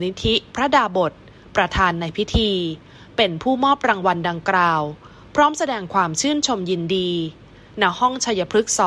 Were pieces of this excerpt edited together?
no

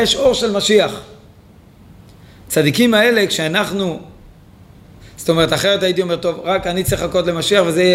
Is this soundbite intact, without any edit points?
yes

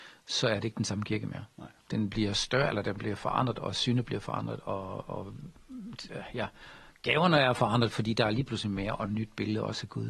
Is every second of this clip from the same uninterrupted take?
yes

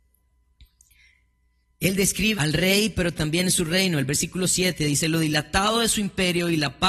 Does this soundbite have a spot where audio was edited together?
yes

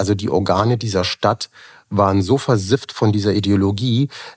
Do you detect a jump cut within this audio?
no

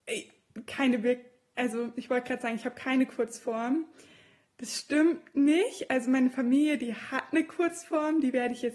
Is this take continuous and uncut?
yes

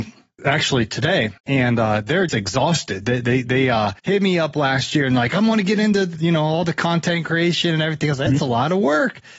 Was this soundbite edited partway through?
yes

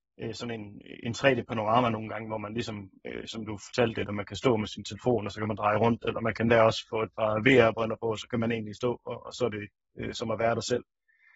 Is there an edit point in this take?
no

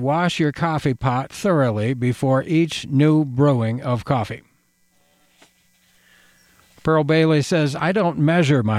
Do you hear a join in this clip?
no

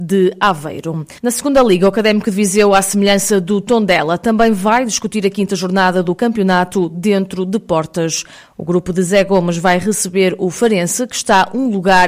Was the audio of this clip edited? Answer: yes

